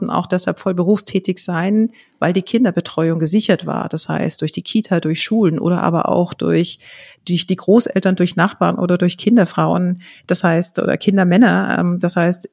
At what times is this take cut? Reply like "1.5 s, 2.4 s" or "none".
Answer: none

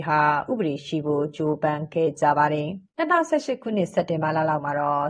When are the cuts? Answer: 2.9 s

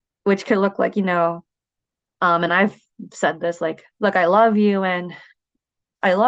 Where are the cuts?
none

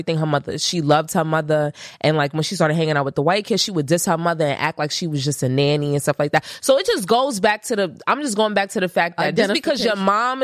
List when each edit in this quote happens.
none

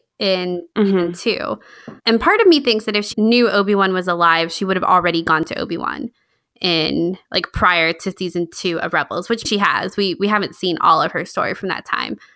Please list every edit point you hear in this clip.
2.0 s, 3.1 s, 7.2 s, 9.4 s

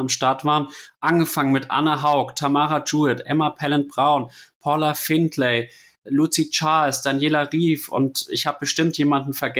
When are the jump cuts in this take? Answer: none

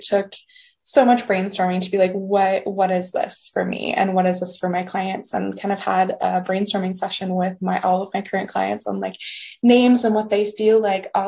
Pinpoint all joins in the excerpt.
none

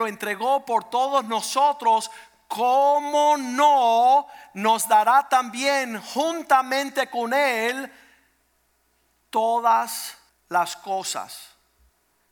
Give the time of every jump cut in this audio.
10.3 s

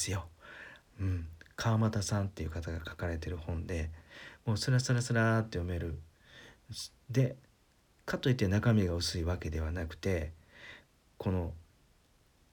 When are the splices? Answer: none

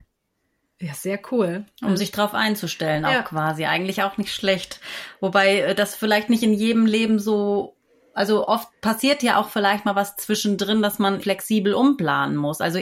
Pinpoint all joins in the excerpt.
11.2 s

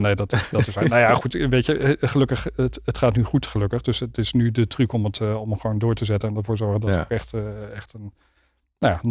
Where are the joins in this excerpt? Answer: none

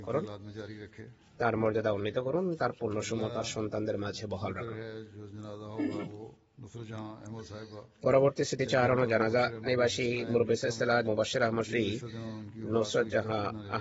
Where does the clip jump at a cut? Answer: 9.7 s, 11.0 s, 11.6 s

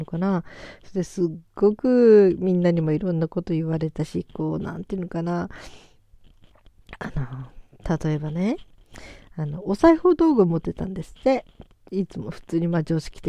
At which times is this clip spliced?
1.5 s

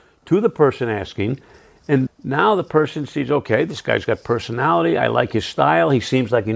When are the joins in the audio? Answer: 2.1 s

